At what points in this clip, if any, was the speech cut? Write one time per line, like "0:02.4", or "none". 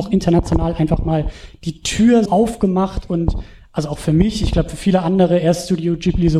0:02.3

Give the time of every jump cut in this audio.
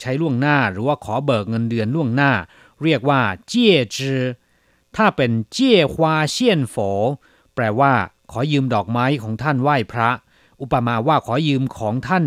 none

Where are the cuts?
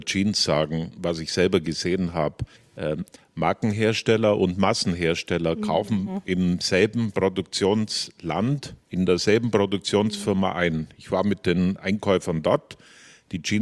0:02.6

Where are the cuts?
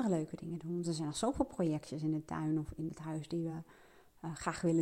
none

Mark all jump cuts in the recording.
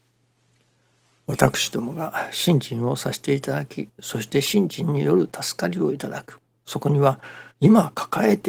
0:06.5
0:07.5

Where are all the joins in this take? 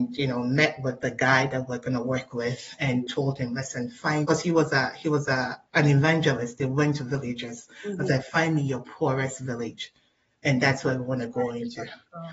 0:04.2
0:05.7

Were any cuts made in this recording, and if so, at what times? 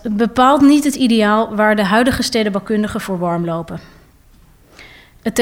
none

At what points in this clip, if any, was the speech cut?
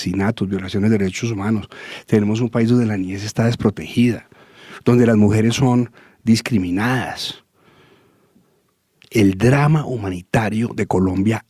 none

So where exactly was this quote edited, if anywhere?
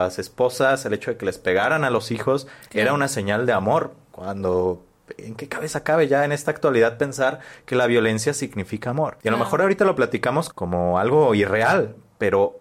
0:09.2
0:10.5

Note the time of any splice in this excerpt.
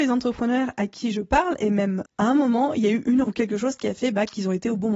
0:02.1
0:03.2

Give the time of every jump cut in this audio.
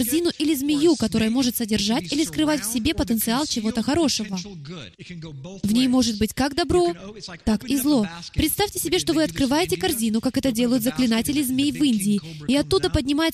0:04.9

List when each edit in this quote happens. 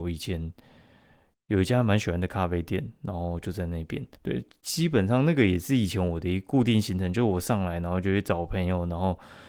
0:04.2

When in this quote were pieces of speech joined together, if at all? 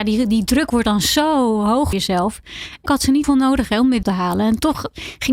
0:01.9
0:02.9
0:03.2
0:04.0

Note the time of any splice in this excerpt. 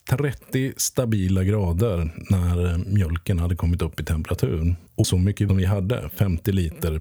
0:05.0
0:05.5

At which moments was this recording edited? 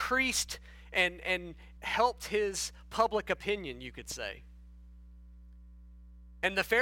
0:01.8

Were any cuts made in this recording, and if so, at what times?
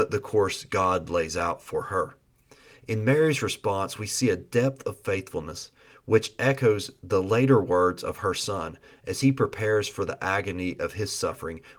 none

